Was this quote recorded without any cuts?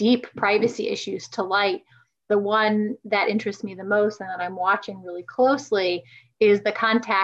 yes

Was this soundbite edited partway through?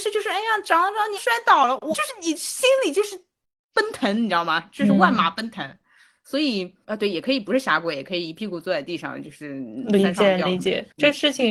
yes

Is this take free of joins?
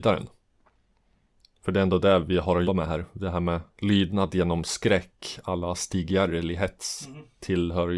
no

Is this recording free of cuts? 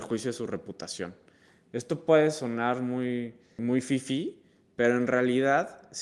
yes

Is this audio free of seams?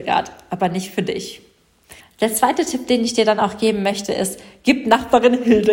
no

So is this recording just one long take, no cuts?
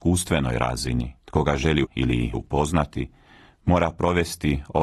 no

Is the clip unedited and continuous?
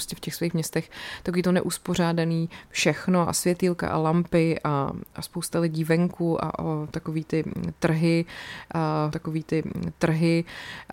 no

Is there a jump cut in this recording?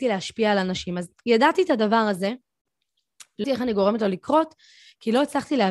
yes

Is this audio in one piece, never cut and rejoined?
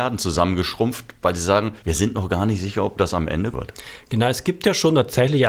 no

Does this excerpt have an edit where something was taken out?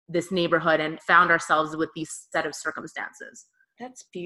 yes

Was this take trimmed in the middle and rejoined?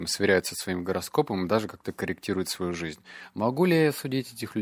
no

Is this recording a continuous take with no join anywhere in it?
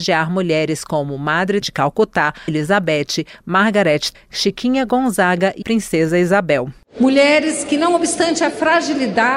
no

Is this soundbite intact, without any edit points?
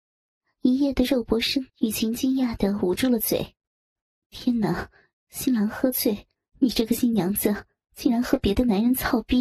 no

